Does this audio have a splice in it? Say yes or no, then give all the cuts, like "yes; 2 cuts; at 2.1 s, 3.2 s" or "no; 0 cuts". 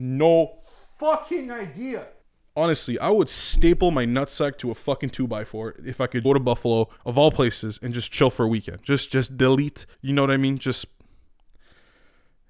yes; 5 cuts; at 2.2 s, 6.2 s, 7.0 s, 9.1 s, 9.9 s